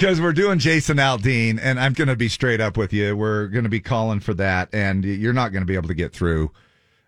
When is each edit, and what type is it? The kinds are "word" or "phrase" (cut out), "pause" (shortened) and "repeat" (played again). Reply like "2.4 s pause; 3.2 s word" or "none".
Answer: 1.9 s word